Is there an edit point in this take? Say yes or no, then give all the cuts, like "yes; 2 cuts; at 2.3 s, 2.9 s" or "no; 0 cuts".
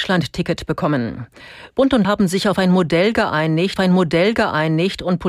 yes; 2 cuts; at 2.0 s, 3.8 s